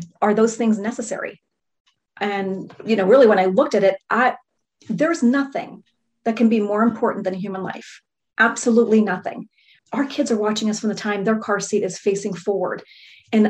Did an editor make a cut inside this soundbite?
yes; 1 cut; at 9.8 s

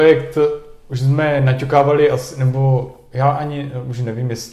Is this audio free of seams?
yes; 0 cuts

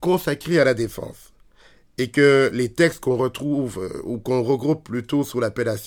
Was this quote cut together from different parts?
no; 0 cuts

